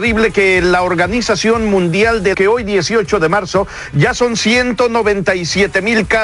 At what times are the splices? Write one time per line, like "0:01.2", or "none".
0:02.3